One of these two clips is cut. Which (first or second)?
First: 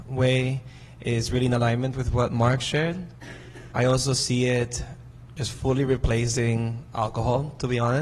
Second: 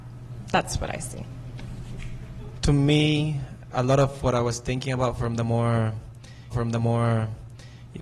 second